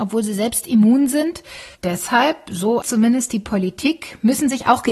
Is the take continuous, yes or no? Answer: no